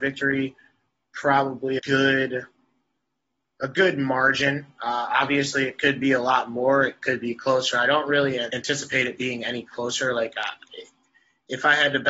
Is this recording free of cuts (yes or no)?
no